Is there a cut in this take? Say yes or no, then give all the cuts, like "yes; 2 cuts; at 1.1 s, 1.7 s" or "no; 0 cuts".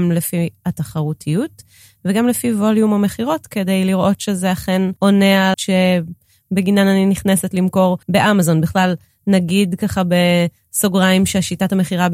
yes; 3 cuts; at 5.0 s, 5.5 s, 8.0 s